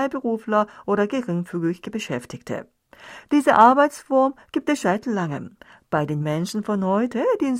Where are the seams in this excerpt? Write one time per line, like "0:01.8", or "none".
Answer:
0:04.8
0:06.2